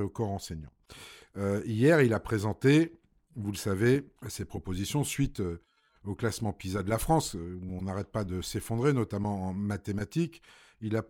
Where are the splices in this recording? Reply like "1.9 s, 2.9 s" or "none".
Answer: 4.2 s